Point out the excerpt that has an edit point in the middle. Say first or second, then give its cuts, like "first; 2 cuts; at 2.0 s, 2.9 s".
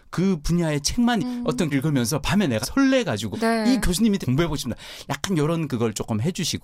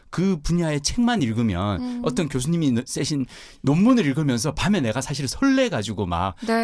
first; 5 cuts; at 1.2 s, 1.7 s, 2.6 s, 3.3 s, 4.2 s